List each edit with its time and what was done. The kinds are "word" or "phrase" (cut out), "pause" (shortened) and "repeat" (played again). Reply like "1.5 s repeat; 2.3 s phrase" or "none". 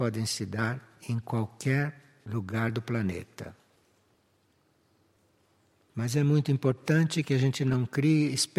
none